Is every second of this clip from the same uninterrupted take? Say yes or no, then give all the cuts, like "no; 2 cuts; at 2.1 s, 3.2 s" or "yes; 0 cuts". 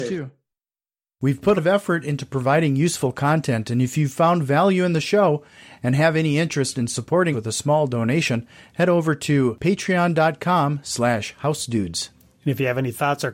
no; 2 cuts; at 1.6 s, 7.3 s